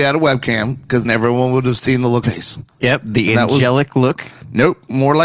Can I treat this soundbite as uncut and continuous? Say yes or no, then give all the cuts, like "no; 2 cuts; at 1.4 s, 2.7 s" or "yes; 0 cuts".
no; 3 cuts; at 1.0 s, 2.2 s, 2.7 s